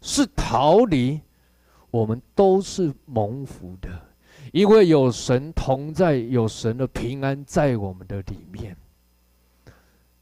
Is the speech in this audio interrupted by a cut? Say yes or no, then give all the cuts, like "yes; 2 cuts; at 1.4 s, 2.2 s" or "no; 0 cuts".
no; 0 cuts